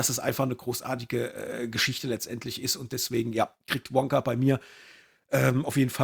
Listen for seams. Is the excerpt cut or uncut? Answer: uncut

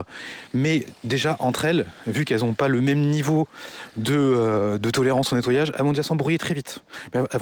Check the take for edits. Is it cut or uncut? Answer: uncut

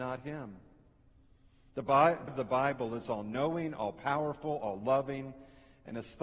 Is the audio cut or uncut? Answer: cut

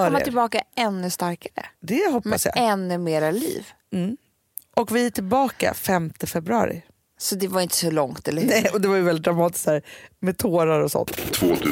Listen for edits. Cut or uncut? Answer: uncut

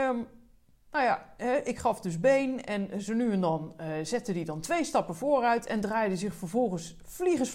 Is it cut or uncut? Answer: uncut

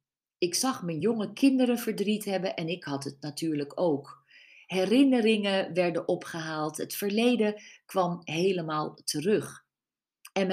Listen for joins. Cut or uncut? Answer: uncut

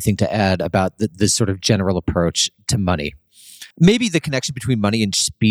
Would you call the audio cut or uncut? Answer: cut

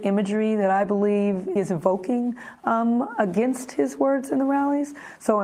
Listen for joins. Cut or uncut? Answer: cut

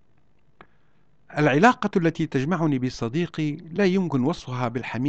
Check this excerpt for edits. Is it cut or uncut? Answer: uncut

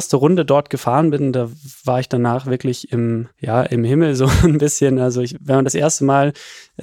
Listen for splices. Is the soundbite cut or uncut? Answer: cut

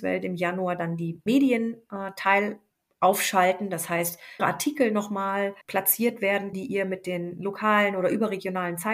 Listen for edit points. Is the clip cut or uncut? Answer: cut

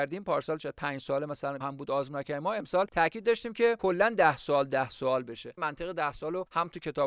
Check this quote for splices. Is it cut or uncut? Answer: cut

